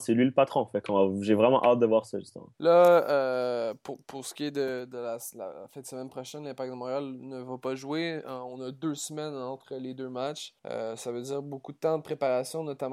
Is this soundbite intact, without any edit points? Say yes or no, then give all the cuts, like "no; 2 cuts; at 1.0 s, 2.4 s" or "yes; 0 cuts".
no; 2 cuts; at 2.5 s, 10.6 s